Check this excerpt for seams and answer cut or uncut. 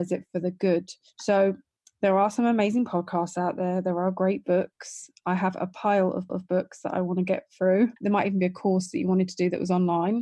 cut